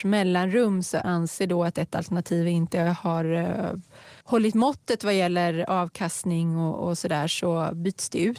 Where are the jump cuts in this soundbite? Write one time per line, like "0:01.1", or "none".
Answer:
0:01.0
0:04.2